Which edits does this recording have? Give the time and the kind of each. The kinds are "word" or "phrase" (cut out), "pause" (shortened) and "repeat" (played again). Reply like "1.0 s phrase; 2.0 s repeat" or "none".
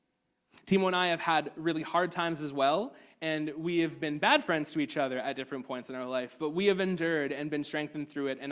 none